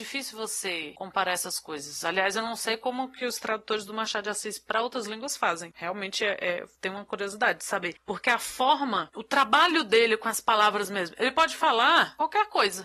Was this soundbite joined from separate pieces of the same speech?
no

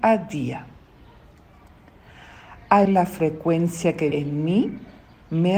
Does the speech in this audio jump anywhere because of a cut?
yes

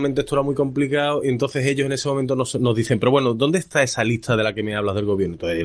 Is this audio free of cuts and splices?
yes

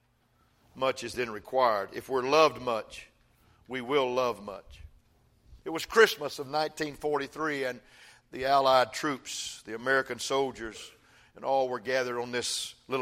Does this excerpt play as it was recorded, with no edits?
yes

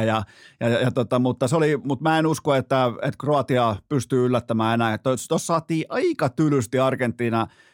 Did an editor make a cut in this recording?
no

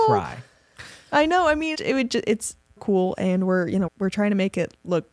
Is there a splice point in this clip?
yes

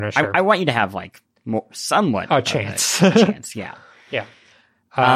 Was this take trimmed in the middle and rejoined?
no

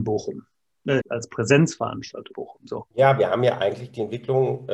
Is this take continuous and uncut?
no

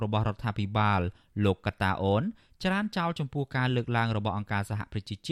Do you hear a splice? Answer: no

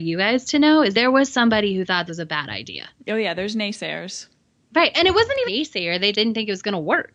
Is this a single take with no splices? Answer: no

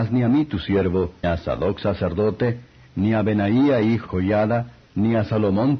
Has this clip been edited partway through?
yes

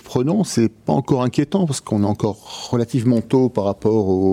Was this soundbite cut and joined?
no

